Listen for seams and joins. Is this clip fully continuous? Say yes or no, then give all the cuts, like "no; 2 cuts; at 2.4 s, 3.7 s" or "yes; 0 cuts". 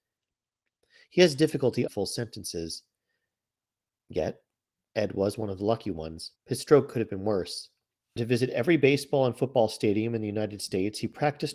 no; 3 cuts; at 1.9 s, 6.4 s, 8.2 s